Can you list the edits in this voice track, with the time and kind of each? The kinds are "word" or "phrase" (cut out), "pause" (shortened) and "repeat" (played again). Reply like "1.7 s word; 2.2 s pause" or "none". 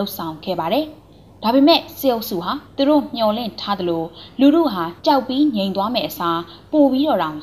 2.6 s pause; 5.0 s pause